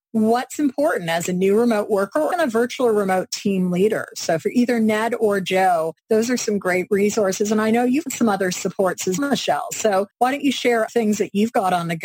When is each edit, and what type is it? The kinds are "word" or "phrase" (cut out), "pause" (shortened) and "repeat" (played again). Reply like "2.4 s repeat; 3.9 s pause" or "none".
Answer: 2.3 s word; 6.0 s pause; 8.1 s word; 9.2 s word; 10.1 s pause; 10.9 s word

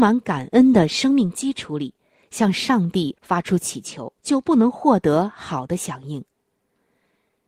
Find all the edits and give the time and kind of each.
3.2 s pause; 4.2 s pause

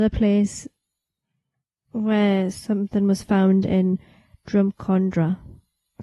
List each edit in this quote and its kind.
none

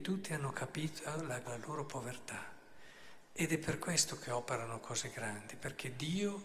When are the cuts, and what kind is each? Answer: 1.4 s word

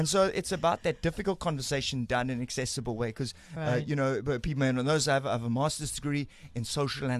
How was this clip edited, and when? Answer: none

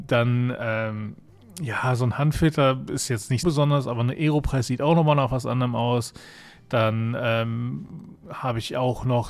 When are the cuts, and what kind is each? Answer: 3.4 s word

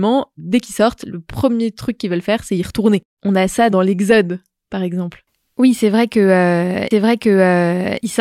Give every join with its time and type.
3.1 s pause; 6.9 s repeat

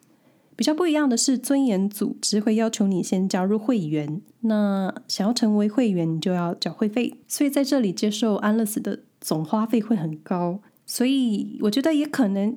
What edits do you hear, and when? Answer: 4.3 s pause; 7.2 s pause; 10.7 s pause

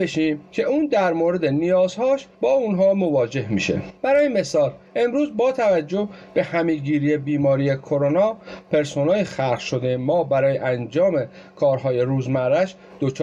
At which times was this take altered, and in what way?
none

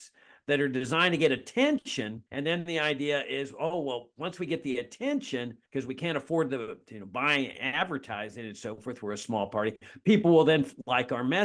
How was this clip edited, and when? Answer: 2.3 s pause; 5.7 s pause

